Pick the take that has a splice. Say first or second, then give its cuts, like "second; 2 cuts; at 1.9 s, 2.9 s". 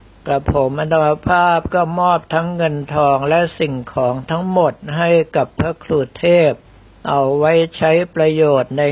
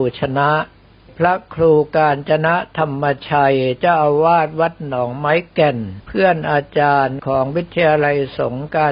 second; 1 cut; at 6.0 s